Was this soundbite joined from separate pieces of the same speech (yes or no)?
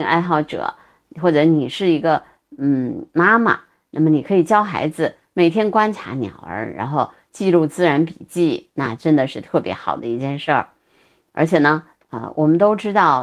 no